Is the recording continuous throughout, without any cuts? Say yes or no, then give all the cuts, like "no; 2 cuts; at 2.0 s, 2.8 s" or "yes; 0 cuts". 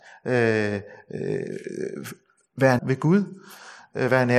no; 1 cut; at 2.8 s